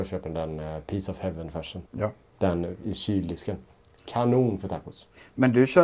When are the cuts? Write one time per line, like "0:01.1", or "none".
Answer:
0:01.9